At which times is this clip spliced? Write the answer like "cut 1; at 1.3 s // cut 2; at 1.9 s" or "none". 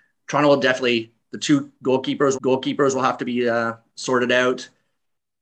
cut 1; at 2.3 s